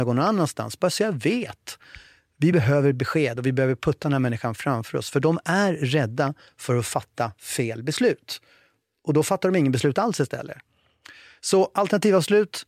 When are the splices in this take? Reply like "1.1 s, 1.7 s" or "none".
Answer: none